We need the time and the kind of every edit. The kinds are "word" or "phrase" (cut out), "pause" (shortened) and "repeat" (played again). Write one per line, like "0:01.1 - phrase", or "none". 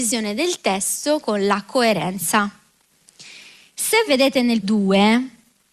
0:01.2 - word
0:04.1 - word
0:04.6 - word